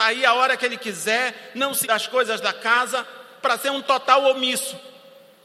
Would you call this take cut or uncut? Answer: cut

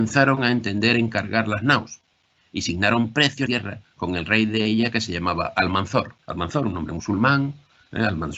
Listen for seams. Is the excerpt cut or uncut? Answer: cut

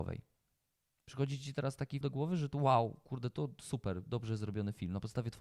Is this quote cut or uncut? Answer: cut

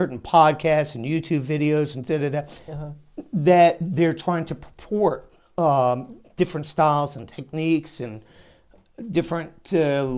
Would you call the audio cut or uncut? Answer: uncut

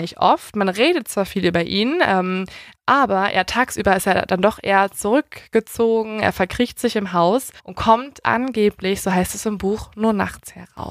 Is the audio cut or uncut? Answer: cut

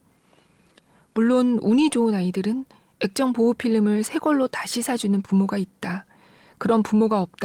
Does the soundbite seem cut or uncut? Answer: uncut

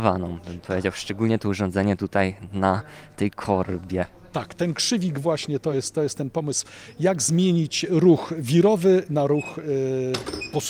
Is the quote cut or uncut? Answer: uncut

